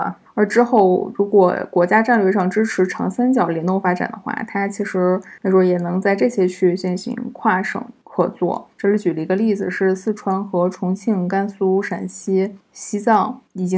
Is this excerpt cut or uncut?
cut